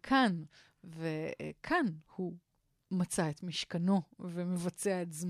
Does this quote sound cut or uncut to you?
cut